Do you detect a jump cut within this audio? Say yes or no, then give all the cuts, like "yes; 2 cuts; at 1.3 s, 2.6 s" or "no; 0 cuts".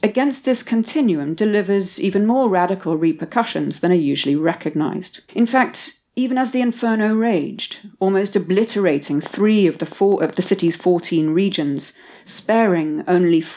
yes; 1 cut; at 5.3 s